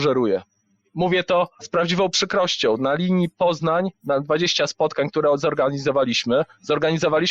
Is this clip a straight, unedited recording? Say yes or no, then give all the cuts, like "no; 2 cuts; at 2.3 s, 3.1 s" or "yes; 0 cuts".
no; 1 cut; at 3.9 s